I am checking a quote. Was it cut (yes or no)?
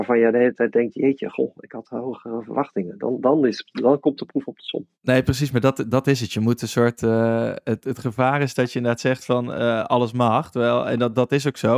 yes